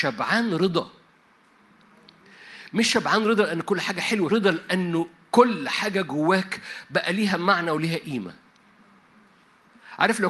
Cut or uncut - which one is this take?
cut